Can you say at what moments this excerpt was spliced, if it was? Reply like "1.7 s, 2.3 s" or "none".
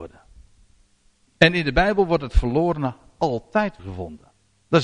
3.8 s